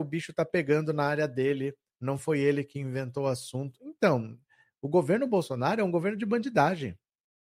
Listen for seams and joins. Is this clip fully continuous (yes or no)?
yes